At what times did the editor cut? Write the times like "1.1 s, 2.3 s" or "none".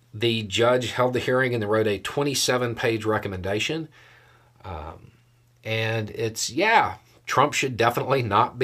none